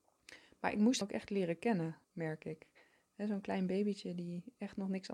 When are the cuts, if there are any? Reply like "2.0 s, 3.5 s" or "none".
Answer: 1.0 s, 2.0 s